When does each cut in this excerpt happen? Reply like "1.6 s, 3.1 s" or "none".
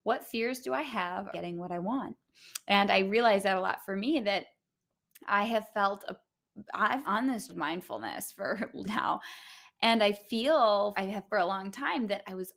1.3 s, 7.0 s, 7.5 s, 8.8 s, 10.9 s, 11.3 s